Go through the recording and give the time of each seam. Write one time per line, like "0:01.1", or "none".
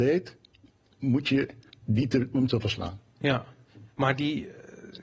0:01.7
0:02.3